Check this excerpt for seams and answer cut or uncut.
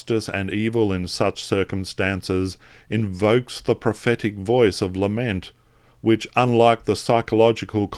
uncut